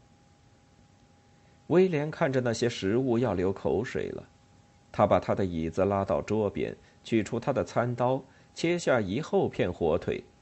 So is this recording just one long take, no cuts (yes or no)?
yes